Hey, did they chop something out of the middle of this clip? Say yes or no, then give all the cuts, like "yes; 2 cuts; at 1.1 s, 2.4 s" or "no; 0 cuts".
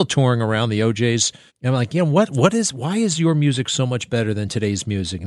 yes; 1 cut; at 1.5 s